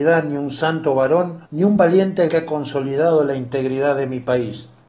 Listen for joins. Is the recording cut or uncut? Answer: cut